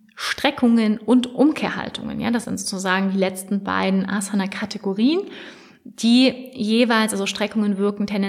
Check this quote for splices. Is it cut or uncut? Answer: cut